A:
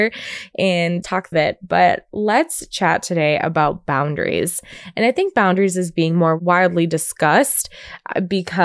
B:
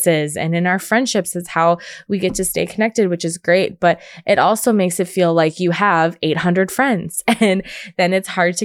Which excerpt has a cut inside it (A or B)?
A